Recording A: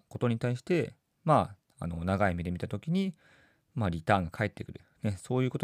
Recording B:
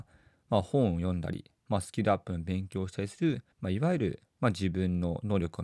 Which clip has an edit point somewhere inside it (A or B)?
B